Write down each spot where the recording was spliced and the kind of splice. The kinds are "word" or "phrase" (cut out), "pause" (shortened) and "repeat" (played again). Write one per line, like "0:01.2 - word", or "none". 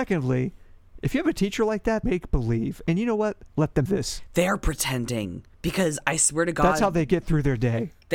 0:02.0 - phrase
0:03.5 - pause
0:03.9 - word
0:05.5 - pause